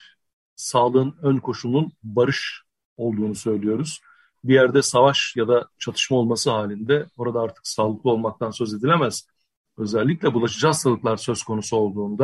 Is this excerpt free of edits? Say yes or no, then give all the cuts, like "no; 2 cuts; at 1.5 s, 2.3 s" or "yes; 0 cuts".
yes; 0 cuts